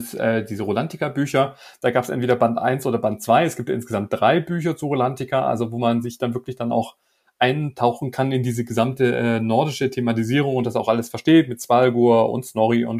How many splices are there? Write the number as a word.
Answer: zero